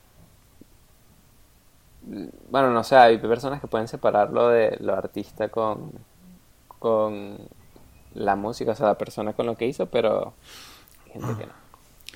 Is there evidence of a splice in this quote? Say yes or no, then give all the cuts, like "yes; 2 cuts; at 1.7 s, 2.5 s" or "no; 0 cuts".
no; 0 cuts